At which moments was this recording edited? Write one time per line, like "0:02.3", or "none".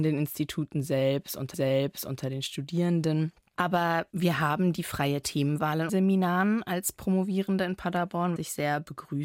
0:01.5
0:05.9
0:08.4

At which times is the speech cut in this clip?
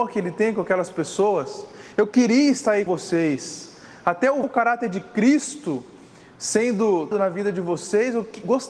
0:02.9
0:04.4
0:07.1

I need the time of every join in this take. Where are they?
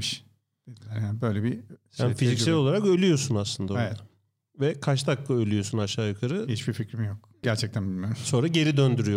none

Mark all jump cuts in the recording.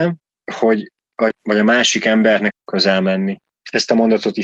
0:01.3
0:02.5

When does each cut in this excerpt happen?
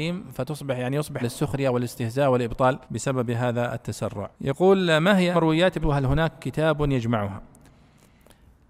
0:01.2
0:02.8
0:04.3
0:05.3
0:05.8

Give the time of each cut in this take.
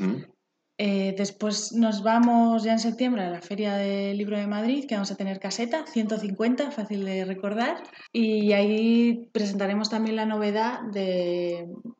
0:08.1

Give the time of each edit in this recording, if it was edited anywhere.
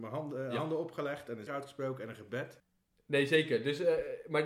0:01.5
0:02.8

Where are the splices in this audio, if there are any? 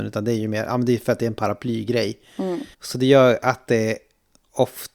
0:02.7

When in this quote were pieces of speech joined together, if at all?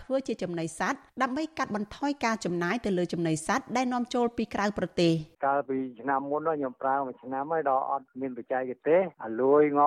0:01.1
0:05.3

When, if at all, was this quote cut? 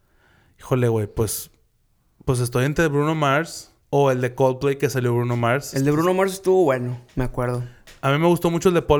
0:03.8

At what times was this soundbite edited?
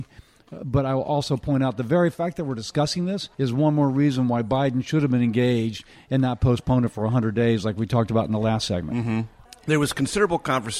0:03.3

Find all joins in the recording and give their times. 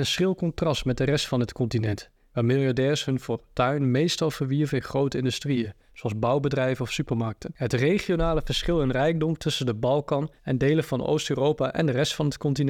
0:10.3

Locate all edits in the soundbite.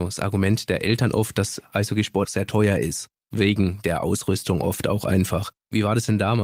0:02.2

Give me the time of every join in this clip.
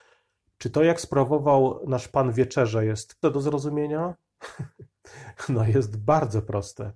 0:03.2

